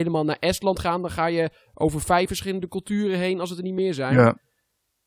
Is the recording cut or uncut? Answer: uncut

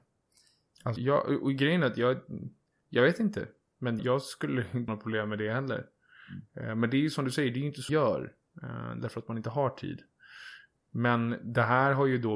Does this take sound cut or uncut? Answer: cut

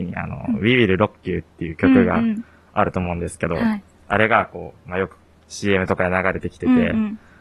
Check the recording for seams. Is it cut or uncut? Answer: uncut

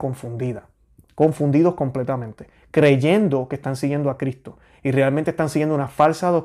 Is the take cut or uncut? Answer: uncut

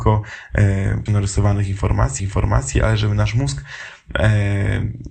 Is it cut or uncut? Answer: cut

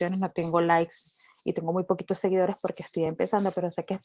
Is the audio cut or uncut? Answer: uncut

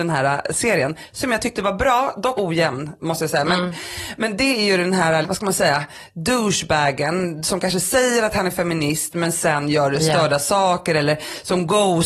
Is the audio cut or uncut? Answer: cut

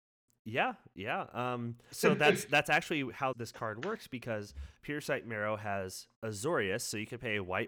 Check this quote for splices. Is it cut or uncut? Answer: cut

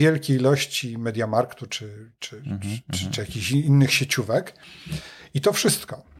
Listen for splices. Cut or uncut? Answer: uncut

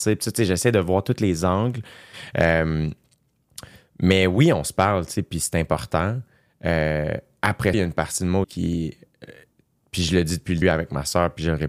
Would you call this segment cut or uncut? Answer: cut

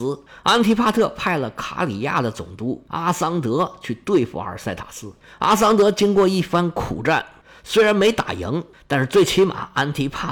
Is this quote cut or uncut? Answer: uncut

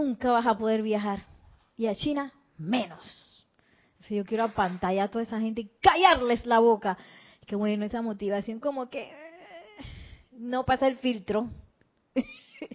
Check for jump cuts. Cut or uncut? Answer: uncut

